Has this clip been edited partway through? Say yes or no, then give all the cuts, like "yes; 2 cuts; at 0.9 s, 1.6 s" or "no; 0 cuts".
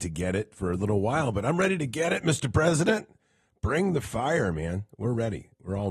no; 0 cuts